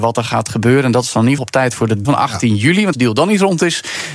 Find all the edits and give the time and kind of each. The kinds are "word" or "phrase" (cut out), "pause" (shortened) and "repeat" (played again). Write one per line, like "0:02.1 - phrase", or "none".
0:01.4 - word
0:02.0 - word
0:02.9 - word

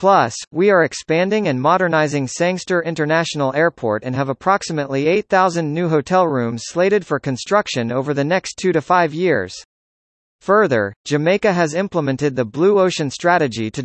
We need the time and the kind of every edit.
none

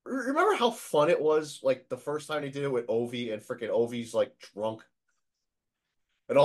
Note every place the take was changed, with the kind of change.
none

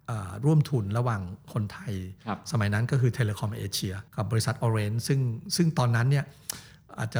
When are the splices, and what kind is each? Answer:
0:04.1 - pause

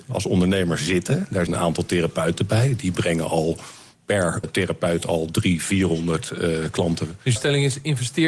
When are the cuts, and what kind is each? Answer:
0:01.5 - word
0:04.4 - word
0:07.4 - word

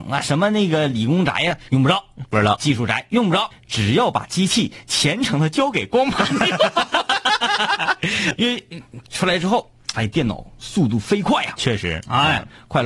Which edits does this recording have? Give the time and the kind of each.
0:01.7 - pause
0:03.5 - word
0:08.4 - word
0:09.9 - word

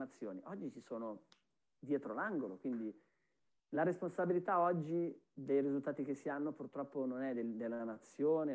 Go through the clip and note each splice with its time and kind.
none

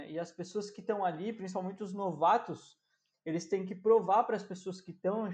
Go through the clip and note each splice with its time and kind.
none

